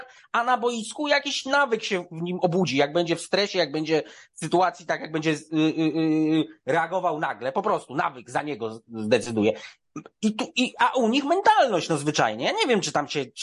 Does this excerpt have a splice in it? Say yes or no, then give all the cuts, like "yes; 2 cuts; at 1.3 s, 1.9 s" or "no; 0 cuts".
no; 0 cuts